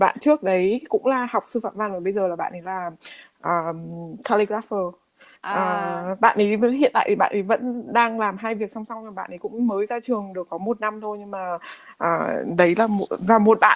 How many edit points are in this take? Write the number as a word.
one